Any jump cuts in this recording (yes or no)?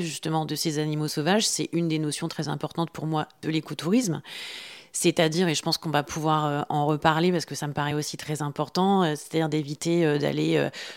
no